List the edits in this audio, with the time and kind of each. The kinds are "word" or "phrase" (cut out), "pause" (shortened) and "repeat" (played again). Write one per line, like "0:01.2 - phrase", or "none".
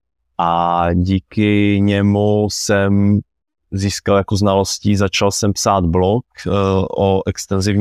0:04.3 - word

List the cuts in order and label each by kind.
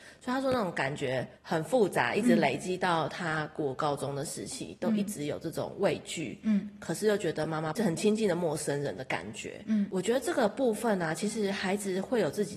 0:01.4 - pause

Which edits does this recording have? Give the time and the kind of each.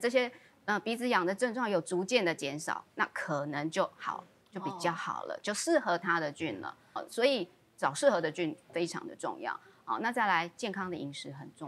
0:04.4 - pause
0:07.0 - word

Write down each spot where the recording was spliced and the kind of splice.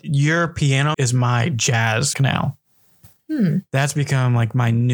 0:00.9 - word
0:02.1 - word

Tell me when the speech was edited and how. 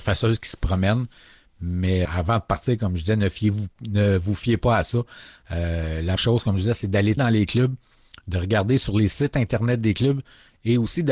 0:02.1 - word
0:06.2 - word
0:07.2 - word

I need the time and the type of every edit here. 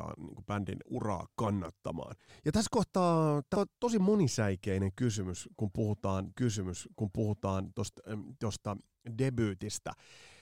0:02.3 - pause
0:03.5 - word
0:06.3 - repeat

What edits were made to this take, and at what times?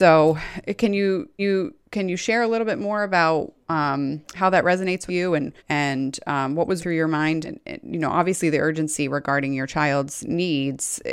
0:01.4 - repeat
0:04.2 - pause
0:05.1 - word
0:05.6 - pause
0:06.8 - word
0:07.4 - word

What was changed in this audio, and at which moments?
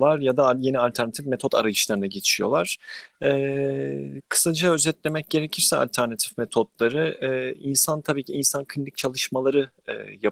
none

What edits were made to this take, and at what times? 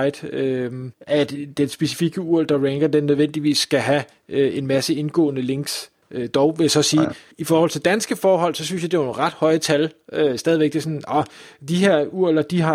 0:00.9 - pause
0:07.3 - pause

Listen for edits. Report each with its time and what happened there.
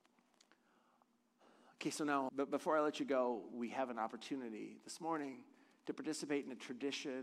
0:02.3 - word

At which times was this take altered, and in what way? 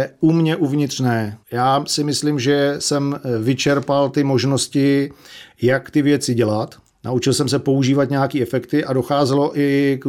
0:01.4 - pause
0:06.9 - pause

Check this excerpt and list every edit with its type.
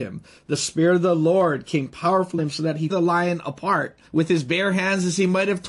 0:02.4 - word
0:02.9 - word
0:04.1 - pause

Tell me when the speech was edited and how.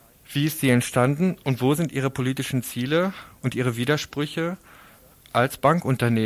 none

